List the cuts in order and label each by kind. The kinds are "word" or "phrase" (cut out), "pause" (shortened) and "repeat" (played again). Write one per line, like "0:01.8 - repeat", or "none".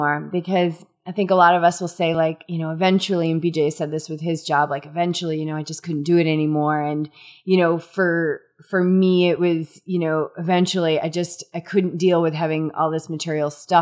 none